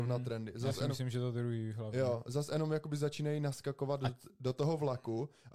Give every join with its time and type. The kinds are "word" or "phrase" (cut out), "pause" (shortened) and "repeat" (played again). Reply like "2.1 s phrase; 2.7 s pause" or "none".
none